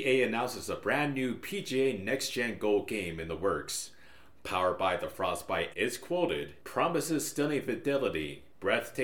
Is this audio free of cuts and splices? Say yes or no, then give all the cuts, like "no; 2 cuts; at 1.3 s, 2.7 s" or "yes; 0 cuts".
no; 1 cut; at 5.7 s